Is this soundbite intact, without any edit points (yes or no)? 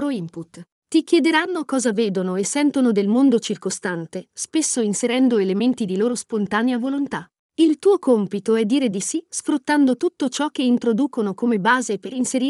yes